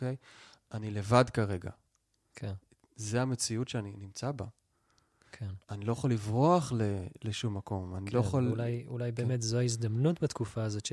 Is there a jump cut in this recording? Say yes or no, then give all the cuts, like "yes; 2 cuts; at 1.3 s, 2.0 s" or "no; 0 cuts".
no; 0 cuts